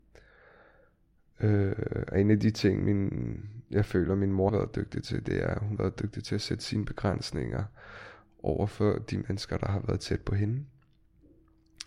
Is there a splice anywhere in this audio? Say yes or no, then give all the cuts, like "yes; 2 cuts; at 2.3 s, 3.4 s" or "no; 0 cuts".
yes; 2 cuts; at 4.5 s, 5.8 s